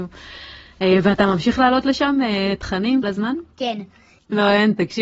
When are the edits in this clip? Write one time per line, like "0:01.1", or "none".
0:03.0
0:03.5